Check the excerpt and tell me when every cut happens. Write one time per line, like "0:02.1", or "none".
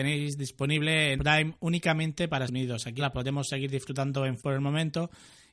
0:01.2
0:02.5
0:03.0
0:04.4